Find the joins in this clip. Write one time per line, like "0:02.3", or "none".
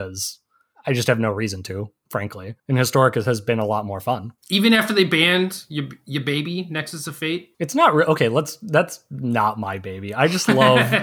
0:02.6
0:04.4
0:07.5